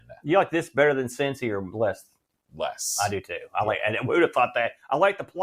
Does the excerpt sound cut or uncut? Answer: uncut